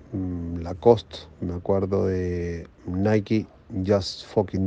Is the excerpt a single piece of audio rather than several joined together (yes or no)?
no